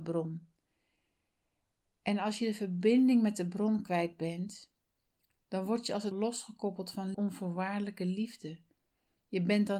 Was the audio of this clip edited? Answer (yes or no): yes